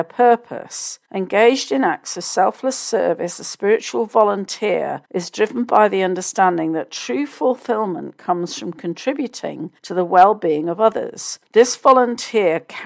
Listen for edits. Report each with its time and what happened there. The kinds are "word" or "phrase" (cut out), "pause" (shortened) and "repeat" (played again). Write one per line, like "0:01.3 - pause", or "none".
0:01.0 - pause
0:05.0 - pause
0:09.8 - pause
0:11.5 - pause